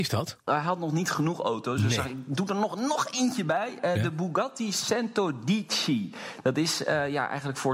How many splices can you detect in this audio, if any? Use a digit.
0